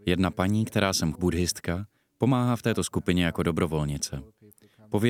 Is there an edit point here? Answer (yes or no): yes